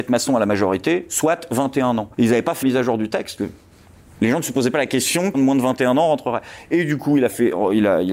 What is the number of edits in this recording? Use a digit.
4